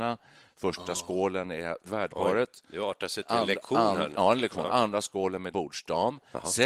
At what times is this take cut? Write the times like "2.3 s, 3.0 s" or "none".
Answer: 1.8 s, 5.5 s